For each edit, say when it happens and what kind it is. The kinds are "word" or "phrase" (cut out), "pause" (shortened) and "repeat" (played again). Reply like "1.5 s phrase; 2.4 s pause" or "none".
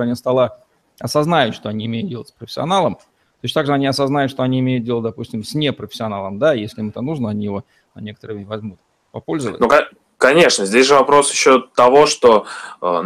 none